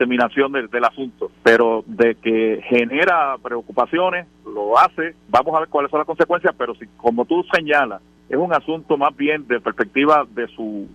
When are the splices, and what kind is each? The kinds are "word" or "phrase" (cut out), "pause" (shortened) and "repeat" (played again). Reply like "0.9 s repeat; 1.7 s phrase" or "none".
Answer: 1.3 s pause; 5.3 s word; 8.2 s pause; 9.6 s word